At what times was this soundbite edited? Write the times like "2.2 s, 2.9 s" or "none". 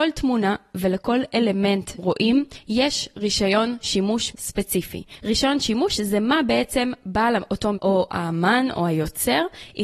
2.0 s, 4.3 s, 7.7 s